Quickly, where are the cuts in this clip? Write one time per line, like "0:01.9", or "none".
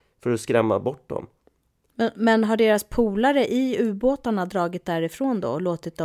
none